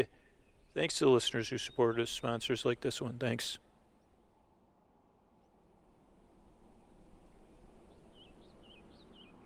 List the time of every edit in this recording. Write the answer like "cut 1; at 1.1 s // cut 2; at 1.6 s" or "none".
none